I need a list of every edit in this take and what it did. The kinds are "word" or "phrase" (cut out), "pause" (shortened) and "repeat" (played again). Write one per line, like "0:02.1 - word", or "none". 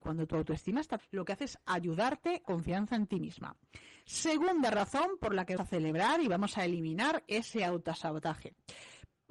0:01.0 - word
0:02.4 - phrase
0:05.6 - word